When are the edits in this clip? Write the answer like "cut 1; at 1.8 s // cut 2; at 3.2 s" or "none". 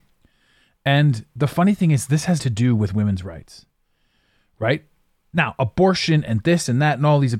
cut 1; at 2.4 s